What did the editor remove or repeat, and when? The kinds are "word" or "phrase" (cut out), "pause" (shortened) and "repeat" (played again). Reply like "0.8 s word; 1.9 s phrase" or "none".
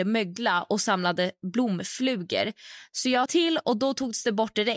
3.3 s word